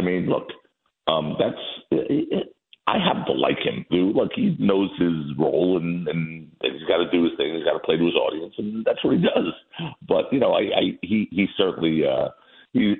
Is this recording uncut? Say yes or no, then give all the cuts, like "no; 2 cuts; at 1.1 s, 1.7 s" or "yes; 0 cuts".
no; 1 cut; at 3.9 s